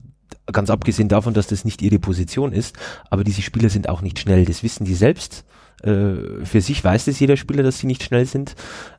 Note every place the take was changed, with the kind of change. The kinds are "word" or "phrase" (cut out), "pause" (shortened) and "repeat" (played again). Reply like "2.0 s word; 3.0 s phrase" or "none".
none